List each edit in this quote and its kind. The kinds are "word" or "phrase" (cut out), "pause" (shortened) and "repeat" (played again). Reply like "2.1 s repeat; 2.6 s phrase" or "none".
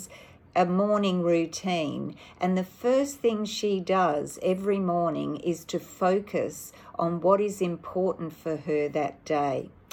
none